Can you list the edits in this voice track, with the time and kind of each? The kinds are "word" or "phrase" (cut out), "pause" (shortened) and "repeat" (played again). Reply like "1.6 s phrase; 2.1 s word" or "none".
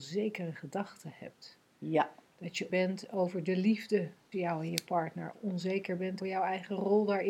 2.7 s word; 4.3 s word; 5.3 s word; 6.2 s word